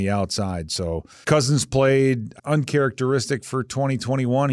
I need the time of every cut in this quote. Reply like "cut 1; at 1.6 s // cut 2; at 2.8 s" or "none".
cut 1; at 1.2 s // cut 2; at 2.4 s